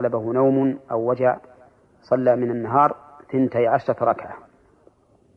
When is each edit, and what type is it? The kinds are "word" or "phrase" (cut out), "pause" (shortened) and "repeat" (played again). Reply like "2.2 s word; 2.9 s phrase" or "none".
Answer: none